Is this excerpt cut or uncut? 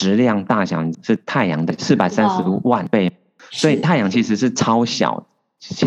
uncut